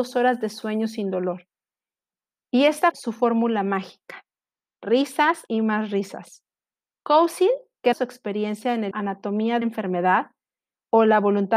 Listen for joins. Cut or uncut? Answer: cut